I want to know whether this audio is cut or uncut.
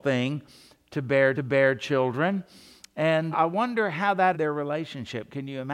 cut